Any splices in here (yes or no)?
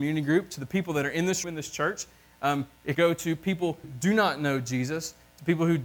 yes